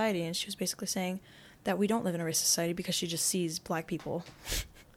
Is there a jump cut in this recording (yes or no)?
no